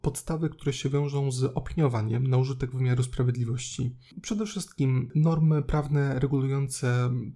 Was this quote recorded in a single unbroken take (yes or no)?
yes